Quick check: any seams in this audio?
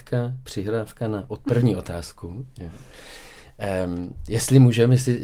no; 0 cuts

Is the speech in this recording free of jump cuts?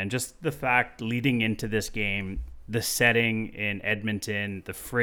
yes; 0 cuts

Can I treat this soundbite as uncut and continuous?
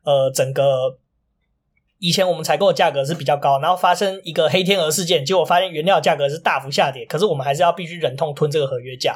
yes; 0 cuts

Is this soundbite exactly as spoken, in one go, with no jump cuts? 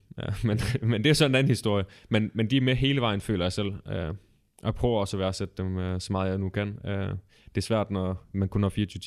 yes; 0 cuts

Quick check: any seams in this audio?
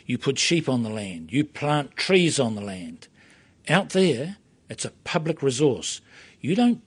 no; 0 cuts

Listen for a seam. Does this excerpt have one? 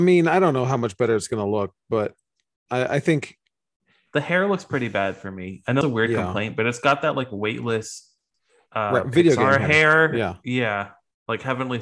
yes; 1 cut; at 5.8 s

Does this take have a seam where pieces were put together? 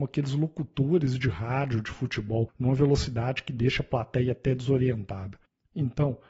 no; 0 cuts

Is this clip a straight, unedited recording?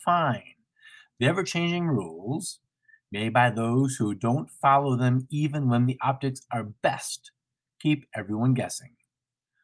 yes; 0 cuts

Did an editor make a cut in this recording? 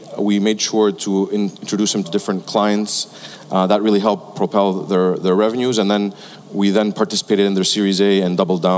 yes; 1 cut; at 2.0 s

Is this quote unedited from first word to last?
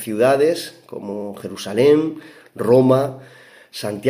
yes; 0 cuts

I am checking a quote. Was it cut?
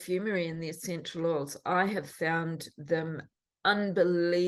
no; 0 cuts

